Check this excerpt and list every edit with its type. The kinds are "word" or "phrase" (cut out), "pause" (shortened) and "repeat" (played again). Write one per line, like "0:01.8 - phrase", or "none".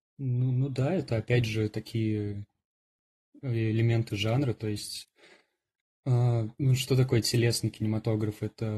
none

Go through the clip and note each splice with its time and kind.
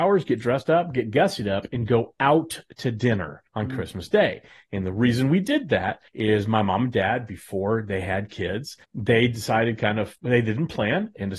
0:03.5 - pause
0:06.1 - pause
0:08.8 - pause
0:10.2 - pause

